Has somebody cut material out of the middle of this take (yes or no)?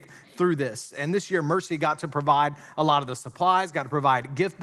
no